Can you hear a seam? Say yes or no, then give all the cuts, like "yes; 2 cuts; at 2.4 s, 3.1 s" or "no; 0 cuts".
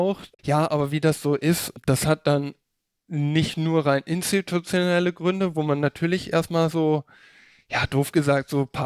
no; 0 cuts